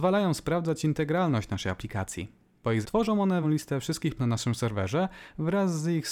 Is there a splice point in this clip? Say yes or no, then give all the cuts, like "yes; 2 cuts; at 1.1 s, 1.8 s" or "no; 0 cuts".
yes; 3 cuts; at 2.8 s, 3.4 s, 4.2 s